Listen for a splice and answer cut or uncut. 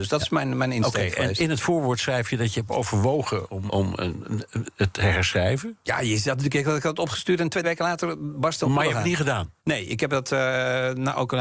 cut